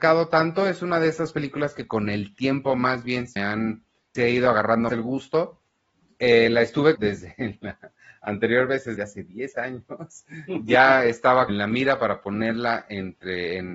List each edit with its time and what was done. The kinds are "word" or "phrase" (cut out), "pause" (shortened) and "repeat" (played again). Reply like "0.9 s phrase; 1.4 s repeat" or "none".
3.4 s word; 4.1 s word; 4.9 s word; 6.9 s word; 9.0 s word; 11.5 s word